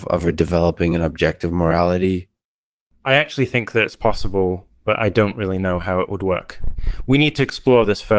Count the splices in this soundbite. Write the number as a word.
zero